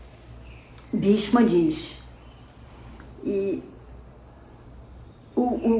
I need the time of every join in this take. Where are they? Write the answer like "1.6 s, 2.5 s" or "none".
none